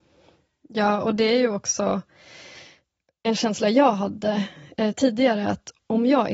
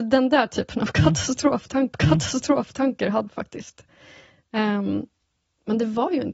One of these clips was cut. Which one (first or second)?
second